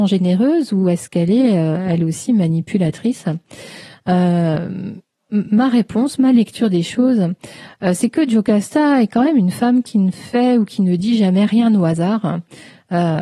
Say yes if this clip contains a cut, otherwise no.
no